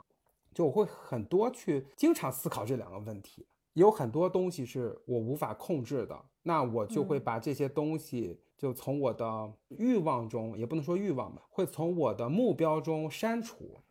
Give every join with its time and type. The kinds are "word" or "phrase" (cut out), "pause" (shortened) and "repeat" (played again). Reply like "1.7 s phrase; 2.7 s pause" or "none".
1.9 s pause; 3.5 s pause; 6.3 s pause; 8.5 s pause